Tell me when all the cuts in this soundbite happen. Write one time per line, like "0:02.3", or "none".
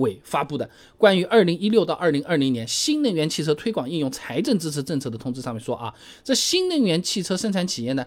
none